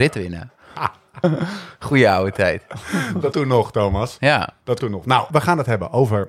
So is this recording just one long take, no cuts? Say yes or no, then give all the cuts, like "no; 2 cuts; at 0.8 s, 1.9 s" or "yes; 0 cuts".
no; 3 cuts; at 3.3 s, 4.8 s, 5.3 s